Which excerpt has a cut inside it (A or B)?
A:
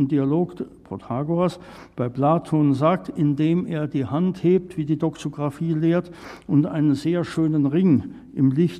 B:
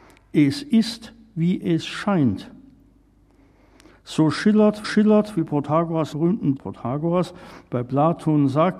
B